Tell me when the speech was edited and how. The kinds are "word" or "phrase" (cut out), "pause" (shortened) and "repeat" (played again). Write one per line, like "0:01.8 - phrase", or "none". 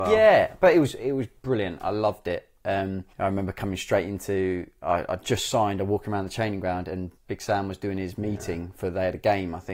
0:03.1 - pause
0:07.2 - word